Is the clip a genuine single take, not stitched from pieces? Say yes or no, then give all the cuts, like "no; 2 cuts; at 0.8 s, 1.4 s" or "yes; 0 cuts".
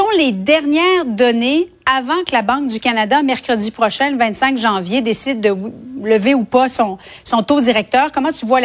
yes; 0 cuts